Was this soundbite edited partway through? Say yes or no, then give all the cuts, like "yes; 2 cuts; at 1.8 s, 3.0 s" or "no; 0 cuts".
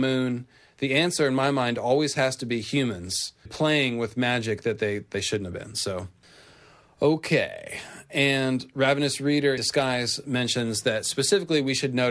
yes; 2 cuts; at 3.5 s, 9.6 s